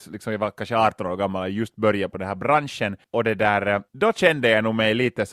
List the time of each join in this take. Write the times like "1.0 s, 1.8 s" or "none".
3.0 s, 3.9 s